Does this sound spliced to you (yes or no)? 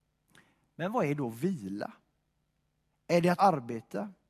yes